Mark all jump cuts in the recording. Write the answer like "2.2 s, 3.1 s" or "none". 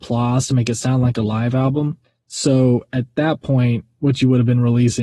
2.0 s